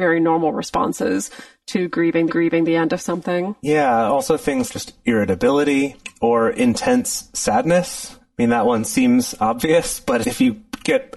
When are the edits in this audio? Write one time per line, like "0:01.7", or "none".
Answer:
0:02.3
0:04.7
0:10.2